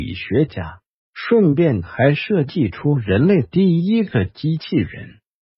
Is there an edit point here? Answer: no; 0 cuts

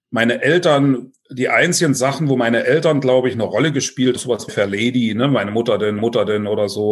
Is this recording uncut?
no; 3 cuts; at 4.2 s, 4.5 s, 6.0 s

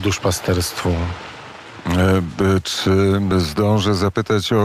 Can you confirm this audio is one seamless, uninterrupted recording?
yes; 0 cuts

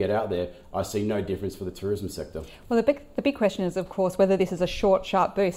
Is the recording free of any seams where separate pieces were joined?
yes; 0 cuts

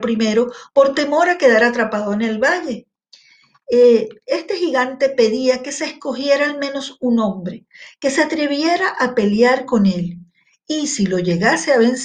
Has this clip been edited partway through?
no; 0 cuts

